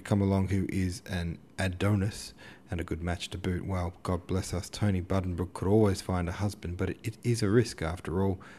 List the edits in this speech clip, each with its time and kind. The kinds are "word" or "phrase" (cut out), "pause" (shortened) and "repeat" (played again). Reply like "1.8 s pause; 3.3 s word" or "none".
none